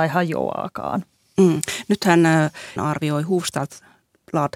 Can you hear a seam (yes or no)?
yes